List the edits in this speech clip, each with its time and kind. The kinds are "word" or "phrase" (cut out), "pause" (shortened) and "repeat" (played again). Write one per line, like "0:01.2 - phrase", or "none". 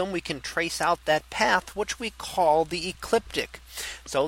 none